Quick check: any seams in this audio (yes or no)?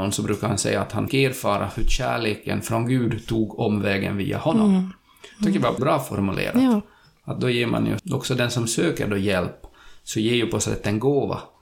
yes